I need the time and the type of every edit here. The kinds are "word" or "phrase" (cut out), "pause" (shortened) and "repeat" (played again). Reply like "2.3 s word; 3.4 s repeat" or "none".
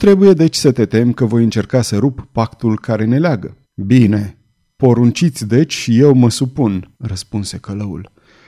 3.6 s pause; 6.9 s pause